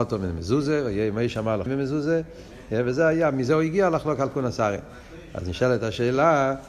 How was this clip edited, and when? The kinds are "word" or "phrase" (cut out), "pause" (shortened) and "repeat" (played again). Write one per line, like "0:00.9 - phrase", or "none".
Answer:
0:01.7 - word